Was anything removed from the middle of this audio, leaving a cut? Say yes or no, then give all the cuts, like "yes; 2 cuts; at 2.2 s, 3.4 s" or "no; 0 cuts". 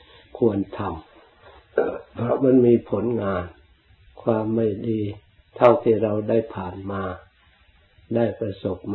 yes; 3 cuts; at 1.1 s, 3.9 s, 5.3 s